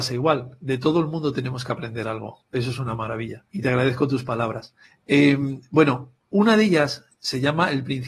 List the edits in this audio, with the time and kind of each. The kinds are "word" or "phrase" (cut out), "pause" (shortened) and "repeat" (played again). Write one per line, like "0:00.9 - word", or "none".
0:03.5 - pause
0:04.8 - pause
0:06.2 - pause